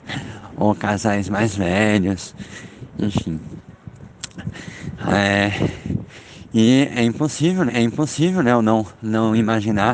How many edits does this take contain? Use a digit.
1